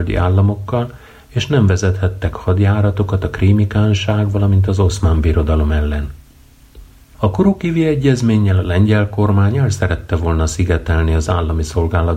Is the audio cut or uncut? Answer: uncut